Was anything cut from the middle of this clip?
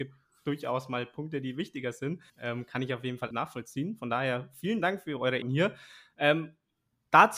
yes; 3 cuts; at 2.3 s, 3.3 s, 5.4 s

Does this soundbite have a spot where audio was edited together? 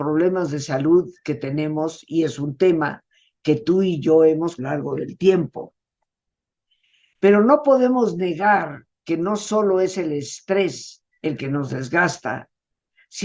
yes; 2 cuts; at 4.6 s, 11.1 s

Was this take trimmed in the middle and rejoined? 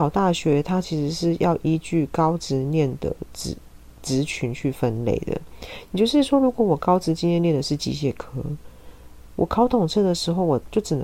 no; 0 cuts

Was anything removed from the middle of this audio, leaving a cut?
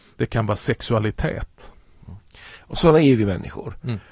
no; 0 cuts

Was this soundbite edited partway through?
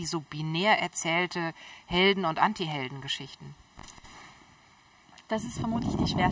no; 0 cuts

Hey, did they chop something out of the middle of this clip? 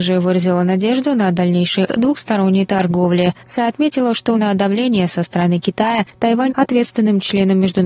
yes; 4 cuts; at 1.9 s, 3.4 s, 4.3 s, 6.5 s

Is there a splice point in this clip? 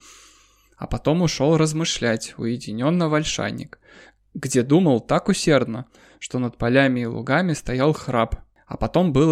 no; 0 cuts

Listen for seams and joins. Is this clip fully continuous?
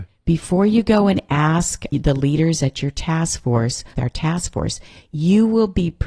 no; 2 cuts; at 1.9 s, 3.9 s

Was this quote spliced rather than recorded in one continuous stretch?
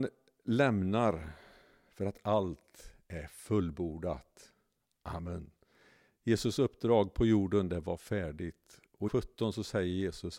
yes; 1 cut; at 9.1 s

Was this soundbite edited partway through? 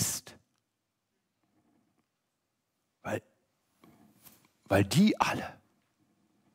no; 0 cuts

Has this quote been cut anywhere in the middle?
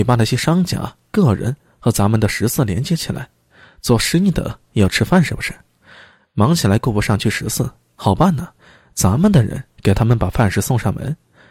no; 0 cuts

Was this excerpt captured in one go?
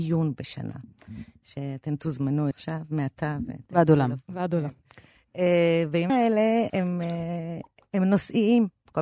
no; 3 cuts; at 2.5 s, 6.1 s, 6.7 s

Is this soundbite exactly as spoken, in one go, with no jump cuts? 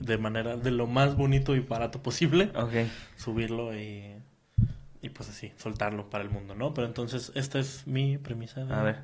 yes; 0 cuts

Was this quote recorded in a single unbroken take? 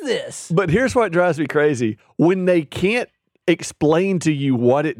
yes; 0 cuts

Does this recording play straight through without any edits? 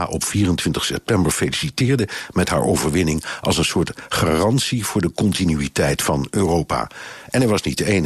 yes; 0 cuts

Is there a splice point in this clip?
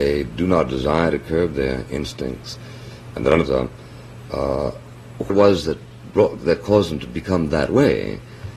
yes; 2 cuts; at 3.5 s, 5.3 s

